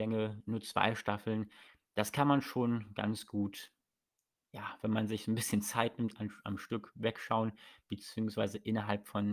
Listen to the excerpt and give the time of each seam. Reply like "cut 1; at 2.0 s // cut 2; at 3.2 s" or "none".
none